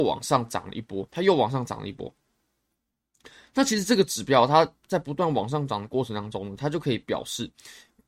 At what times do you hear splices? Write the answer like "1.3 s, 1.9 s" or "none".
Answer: 1.1 s